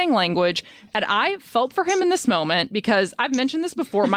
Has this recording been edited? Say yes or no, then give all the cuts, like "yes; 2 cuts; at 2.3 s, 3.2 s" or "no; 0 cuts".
no; 0 cuts